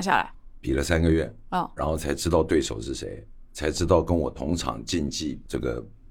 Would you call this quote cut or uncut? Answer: uncut